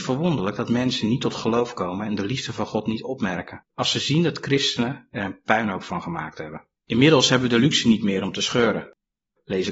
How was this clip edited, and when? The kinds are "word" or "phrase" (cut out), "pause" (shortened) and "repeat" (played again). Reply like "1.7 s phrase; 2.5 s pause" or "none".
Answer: 3.7 s pause; 6.8 s pause